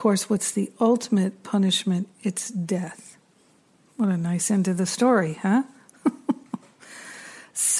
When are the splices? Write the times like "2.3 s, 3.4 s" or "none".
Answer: none